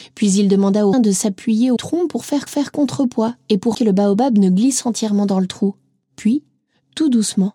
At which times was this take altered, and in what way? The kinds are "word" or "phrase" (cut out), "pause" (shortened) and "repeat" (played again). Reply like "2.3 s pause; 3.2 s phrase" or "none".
0.9 s word; 1.8 s phrase; 2.5 s repeat; 3.7 s word